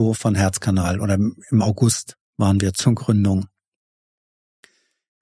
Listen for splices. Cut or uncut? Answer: uncut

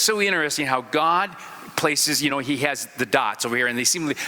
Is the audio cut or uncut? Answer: uncut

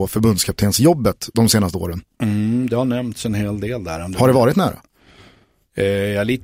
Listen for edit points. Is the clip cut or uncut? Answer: uncut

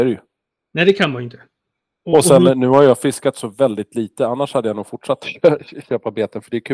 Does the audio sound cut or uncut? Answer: uncut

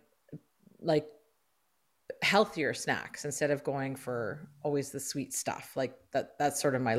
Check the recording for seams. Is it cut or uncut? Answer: uncut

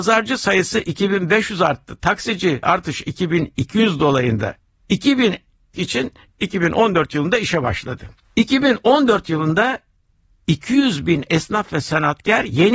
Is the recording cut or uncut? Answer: cut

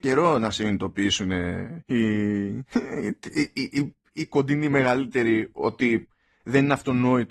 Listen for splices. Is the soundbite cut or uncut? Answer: uncut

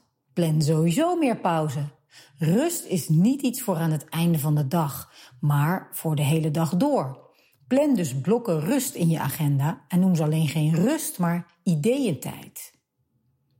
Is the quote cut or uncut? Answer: uncut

